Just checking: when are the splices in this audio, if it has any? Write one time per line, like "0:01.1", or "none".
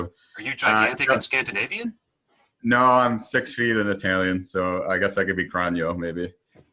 none